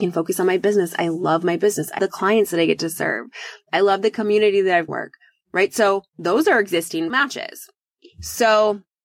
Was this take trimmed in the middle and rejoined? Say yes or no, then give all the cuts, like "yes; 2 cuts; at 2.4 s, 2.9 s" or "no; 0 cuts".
yes; 4 cuts; at 2.0 s, 4.9 s, 6.1 s, 7.1 s